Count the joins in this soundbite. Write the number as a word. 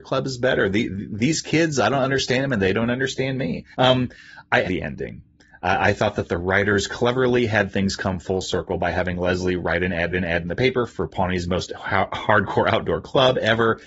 three